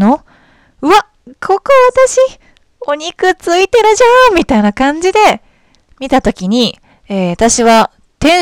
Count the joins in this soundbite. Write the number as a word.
zero